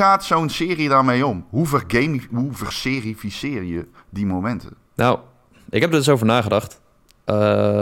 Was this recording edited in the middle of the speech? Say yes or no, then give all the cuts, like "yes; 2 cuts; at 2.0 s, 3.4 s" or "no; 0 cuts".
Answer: yes; 1 cut; at 4.8 s